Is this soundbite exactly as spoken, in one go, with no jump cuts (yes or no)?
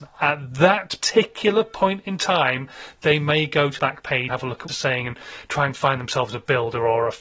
no